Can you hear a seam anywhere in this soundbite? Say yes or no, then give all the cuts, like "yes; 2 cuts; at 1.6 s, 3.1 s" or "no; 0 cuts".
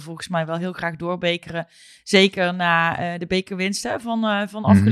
no; 0 cuts